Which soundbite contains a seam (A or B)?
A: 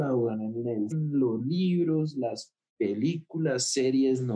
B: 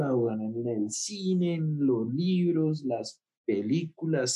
A